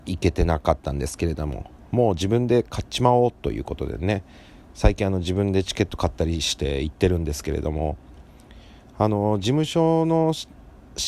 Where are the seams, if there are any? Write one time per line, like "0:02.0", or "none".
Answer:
none